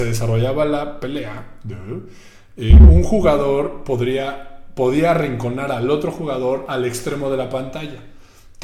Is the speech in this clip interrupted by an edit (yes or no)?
no